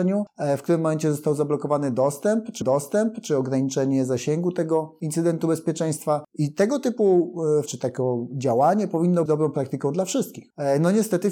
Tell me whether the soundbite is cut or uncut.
cut